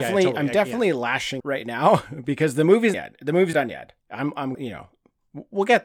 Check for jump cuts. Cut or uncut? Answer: cut